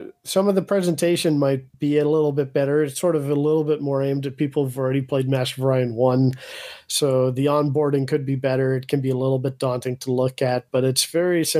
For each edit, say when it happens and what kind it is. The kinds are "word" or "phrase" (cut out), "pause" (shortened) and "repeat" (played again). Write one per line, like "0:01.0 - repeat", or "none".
0:01.7 - pause